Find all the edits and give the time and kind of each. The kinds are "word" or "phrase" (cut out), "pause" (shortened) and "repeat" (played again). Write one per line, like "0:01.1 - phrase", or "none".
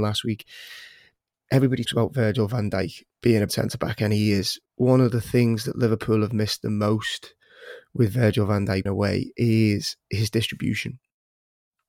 0:01.9 - word
0:03.1 - pause
0:03.5 - word
0:04.7 - pause
0:08.9 - word
0:10.0 - pause